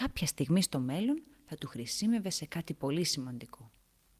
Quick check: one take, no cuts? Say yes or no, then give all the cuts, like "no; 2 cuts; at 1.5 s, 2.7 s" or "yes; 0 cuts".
yes; 0 cuts